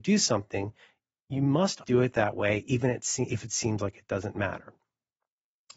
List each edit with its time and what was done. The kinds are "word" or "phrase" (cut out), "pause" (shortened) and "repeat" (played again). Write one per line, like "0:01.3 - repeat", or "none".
0:01.8 - word